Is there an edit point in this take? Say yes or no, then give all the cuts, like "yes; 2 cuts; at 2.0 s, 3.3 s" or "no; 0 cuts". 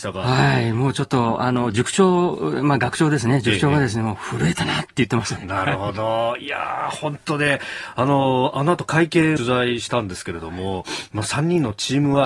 yes; 2 cuts; at 5.4 s, 9.4 s